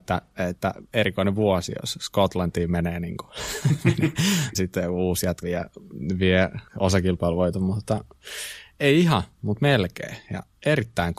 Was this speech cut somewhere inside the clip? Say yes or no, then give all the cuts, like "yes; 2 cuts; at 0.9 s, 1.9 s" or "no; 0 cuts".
yes; 3 cuts; at 4.5 s, 5.4 s, 6.7 s